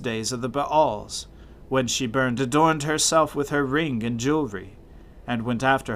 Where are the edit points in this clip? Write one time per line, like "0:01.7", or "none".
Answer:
0:02.4